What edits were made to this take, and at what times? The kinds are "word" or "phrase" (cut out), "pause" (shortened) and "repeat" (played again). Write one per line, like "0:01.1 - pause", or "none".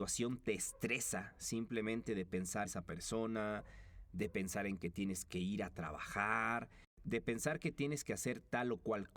0:02.6 - word

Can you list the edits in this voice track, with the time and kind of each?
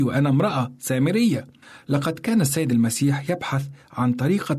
0:01.6 - pause

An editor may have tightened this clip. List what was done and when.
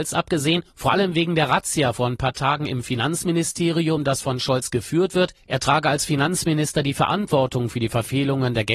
none

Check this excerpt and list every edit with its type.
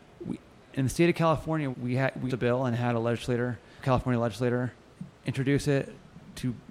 0:01.7 - word
0:02.3 - word
0:03.8 - word
0:05.2 - pause

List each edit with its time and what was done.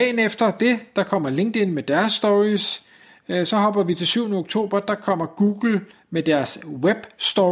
none

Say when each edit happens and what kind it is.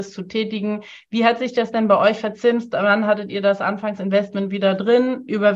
none

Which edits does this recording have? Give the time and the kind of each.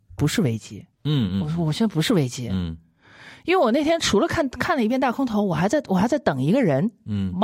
0:00.9 - pause

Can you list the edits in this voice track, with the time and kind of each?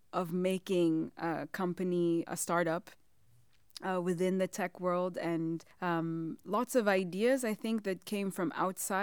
0:02.3 - word
0:05.7 - pause

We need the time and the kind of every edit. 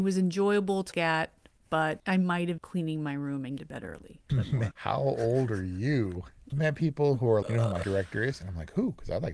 0:00.9 - word
0:02.6 - word
0:03.6 - word
0:04.3 - word
0:04.7 - word
0:06.5 - word
0:07.4 - word
0:07.8 - word

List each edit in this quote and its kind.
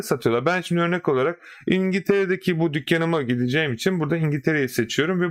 none

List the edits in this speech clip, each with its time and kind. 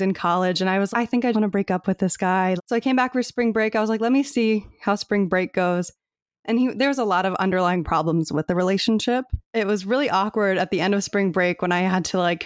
0:00.9 - word
0:01.3 - word
0:02.6 - word
0:09.4 - pause

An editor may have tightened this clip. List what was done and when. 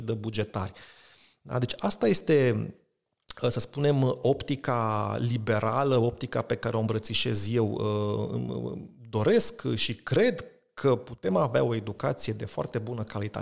none

